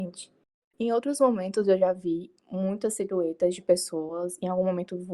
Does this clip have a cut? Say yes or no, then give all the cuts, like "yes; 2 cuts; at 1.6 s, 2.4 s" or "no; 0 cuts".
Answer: no; 0 cuts